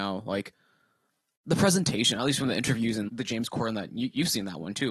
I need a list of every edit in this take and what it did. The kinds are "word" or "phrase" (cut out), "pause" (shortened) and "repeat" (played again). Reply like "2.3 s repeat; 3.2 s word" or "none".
3.1 s word